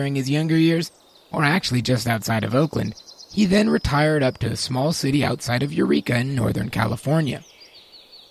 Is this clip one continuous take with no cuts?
yes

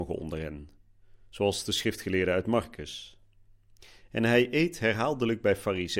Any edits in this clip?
no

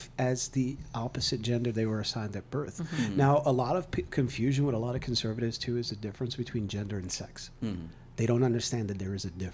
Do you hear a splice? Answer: no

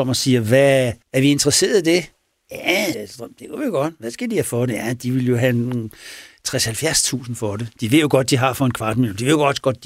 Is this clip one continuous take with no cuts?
no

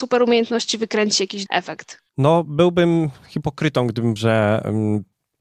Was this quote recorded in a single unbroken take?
no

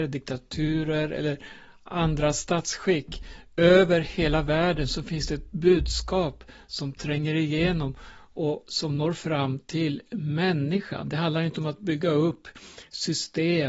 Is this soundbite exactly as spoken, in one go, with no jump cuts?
yes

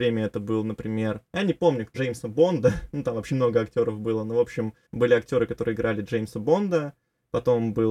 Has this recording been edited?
yes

